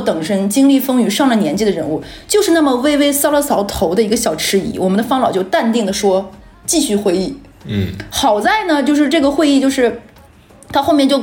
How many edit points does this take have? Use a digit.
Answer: 0